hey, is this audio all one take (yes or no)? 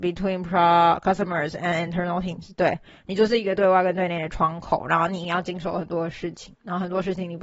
yes